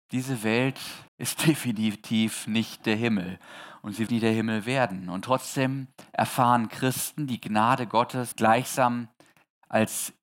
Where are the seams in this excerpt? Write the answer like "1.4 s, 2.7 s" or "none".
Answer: 1.1 s, 4.1 s, 8.3 s